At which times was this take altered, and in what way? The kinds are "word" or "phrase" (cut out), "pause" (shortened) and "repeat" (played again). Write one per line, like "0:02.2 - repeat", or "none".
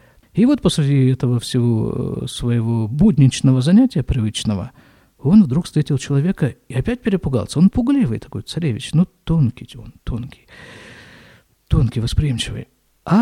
none